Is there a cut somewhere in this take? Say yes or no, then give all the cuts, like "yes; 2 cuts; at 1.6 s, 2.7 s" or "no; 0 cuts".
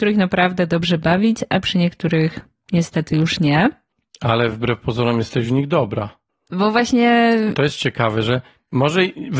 no; 0 cuts